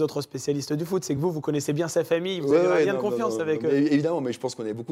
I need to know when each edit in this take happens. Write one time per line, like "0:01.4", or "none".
none